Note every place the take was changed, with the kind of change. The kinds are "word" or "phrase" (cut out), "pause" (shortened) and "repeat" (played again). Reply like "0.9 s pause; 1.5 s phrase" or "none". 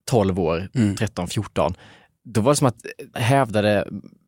3.1 s word